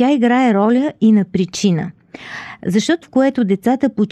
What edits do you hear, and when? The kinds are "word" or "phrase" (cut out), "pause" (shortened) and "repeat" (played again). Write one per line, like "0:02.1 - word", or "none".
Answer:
0:03.0 - word